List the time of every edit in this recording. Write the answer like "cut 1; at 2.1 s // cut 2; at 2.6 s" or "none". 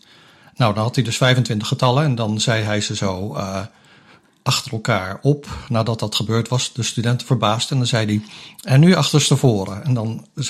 none